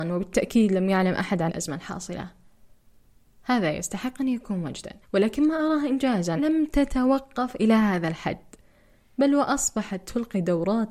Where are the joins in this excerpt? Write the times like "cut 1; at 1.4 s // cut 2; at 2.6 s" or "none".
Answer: cut 1; at 1.5 s // cut 2; at 5.0 s // cut 3; at 6.4 s